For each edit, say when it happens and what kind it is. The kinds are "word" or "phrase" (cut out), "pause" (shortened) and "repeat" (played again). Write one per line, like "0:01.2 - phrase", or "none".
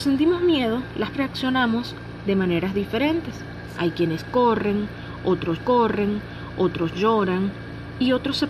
0:01.1 - word
0:05.6 - repeat

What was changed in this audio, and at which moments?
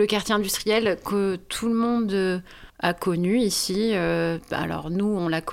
0:02.7 - pause

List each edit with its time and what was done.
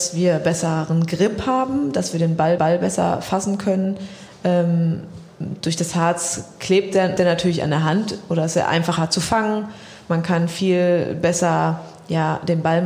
0:02.6 - repeat
0:07.2 - word

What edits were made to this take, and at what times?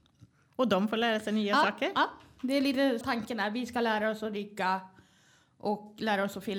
0:03.0 - word

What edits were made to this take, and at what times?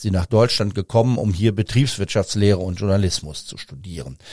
none

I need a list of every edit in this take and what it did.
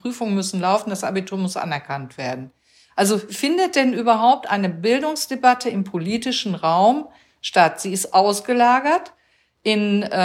none

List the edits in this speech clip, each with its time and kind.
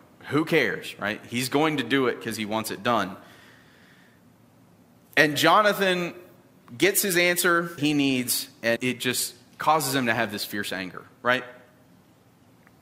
0:07.8 - word
0:08.8 - word

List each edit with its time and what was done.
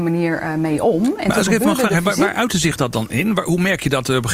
none

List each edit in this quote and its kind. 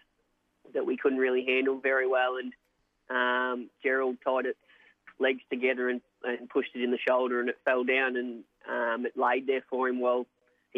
0:03.7 - pause
0:05.1 - pause

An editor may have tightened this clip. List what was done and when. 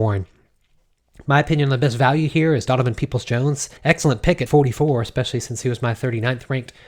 0:03.8 - pause
0:04.5 - word

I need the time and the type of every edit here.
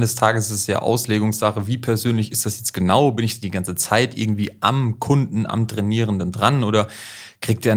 none

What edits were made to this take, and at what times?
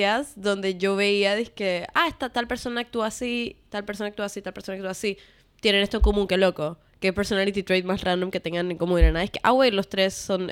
none

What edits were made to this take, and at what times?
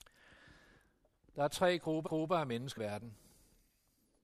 0:02.1 - repeat
0:02.8 - phrase

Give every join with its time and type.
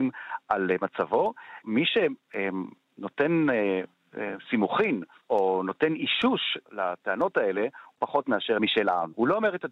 0:01.6 - word
0:05.2 - pause
0:06.6 - word
0:08.0 - word
0:08.6 - phrase

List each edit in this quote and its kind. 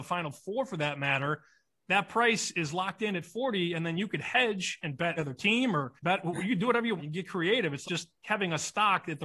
0:05.2 - word
0:06.0 - pause
0:07.0 - word
0:07.8 - word

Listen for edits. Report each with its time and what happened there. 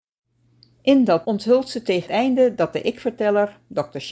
0:01.2 - word
0:02.1 - word

